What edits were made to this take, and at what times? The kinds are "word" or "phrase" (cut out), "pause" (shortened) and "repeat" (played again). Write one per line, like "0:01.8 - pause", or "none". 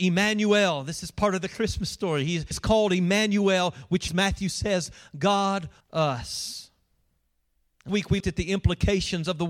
0:02.5 - word
0:04.1 - word
0:05.8 - word
0:07.9 - word
0:08.2 - word